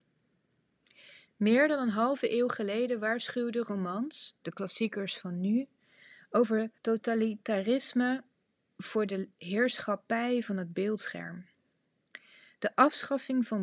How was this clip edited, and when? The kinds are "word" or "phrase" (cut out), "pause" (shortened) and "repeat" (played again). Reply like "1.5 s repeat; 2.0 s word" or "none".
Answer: 6.8 s pause